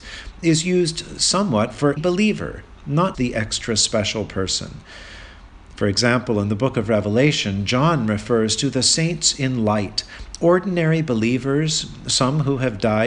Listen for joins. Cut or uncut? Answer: cut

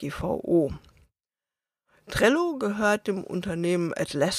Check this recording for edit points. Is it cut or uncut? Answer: uncut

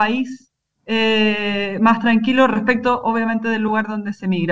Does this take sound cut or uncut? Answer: uncut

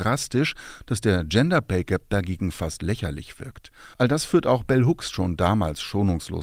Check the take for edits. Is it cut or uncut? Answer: cut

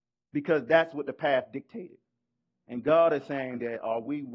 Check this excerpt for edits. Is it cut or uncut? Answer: uncut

